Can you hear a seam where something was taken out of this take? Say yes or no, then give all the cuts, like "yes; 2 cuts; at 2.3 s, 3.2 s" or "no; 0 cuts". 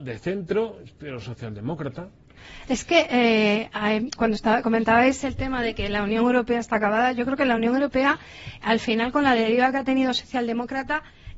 no; 0 cuts